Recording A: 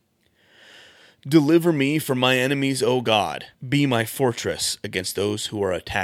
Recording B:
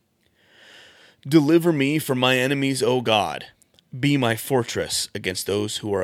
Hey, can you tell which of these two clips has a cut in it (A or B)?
A